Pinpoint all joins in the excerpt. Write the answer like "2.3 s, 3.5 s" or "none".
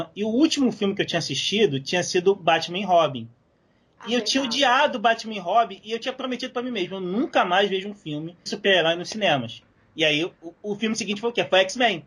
8.5 s